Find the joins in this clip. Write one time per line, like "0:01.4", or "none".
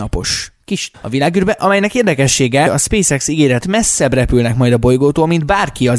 0:00.9
0:02.7
0:03.6